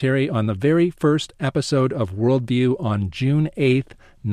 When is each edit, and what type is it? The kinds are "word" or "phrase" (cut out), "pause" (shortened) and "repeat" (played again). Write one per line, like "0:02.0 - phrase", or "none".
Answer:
none